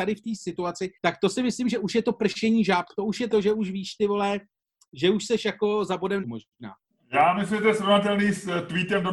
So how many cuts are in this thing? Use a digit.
3